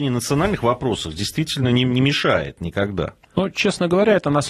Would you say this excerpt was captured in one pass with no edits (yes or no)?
yes